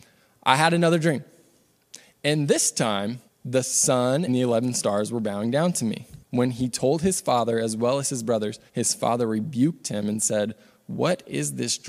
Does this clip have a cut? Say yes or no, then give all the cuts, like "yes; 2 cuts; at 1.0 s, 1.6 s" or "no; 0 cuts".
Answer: yes; 4 cuts; at 3.3 s, 4.3 s, 6.2 s, 8.7 s